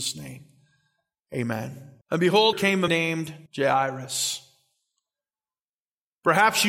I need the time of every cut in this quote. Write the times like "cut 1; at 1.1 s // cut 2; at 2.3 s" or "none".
cut 1; at 2.0 s // cut 2; at 2.5 s // cut 3; at 2.9 s // cut 4; at 3.5 s